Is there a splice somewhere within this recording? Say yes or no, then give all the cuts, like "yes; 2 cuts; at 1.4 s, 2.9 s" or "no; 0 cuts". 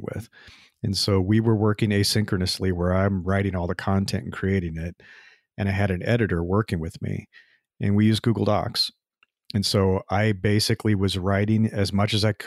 no; 0 cuts